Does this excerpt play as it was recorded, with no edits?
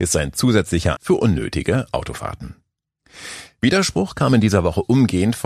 no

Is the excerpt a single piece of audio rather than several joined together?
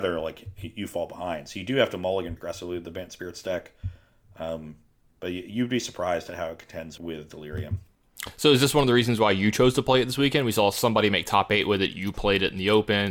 no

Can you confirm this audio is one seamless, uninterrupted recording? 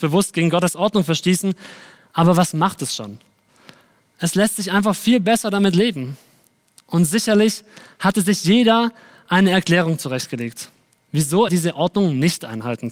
no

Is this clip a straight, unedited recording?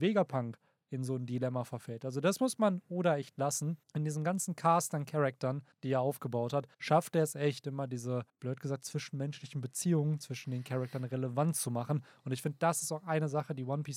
no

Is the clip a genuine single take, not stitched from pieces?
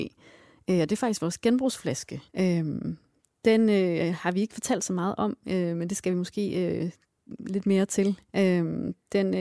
no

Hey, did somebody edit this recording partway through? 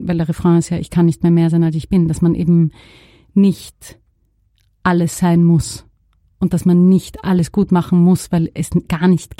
no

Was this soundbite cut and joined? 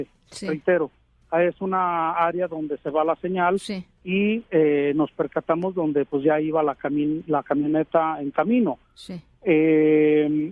no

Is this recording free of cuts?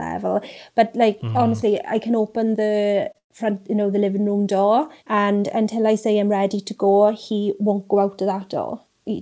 no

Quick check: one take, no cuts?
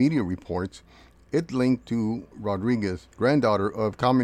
no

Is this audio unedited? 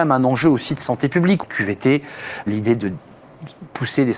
no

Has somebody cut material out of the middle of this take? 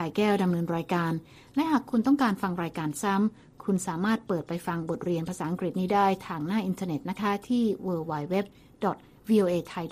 no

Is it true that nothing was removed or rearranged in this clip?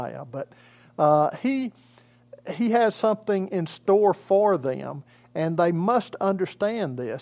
yes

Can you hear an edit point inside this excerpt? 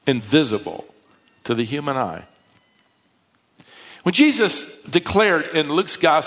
no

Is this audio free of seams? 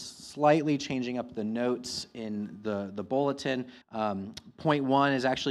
no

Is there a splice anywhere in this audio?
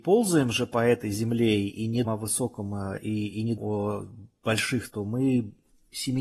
yes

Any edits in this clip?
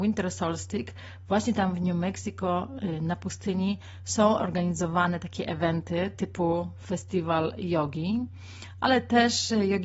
no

